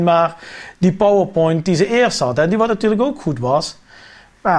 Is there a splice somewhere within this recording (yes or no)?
no